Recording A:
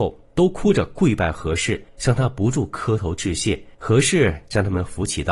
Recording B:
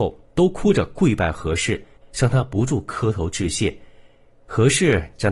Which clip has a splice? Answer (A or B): A